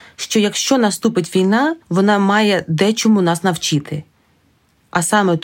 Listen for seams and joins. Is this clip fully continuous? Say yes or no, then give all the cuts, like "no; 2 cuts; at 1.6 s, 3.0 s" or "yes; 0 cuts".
no; 1 cut; at 1.8 s